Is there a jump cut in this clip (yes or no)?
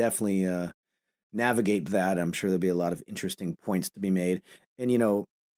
no